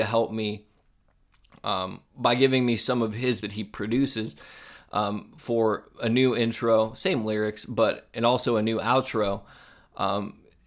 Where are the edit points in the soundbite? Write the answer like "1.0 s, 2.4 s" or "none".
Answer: 2.1 s, 3.4 s